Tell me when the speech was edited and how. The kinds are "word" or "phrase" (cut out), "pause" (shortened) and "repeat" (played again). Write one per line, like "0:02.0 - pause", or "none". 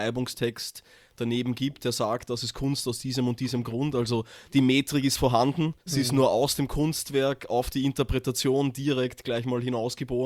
0:05.8 - pause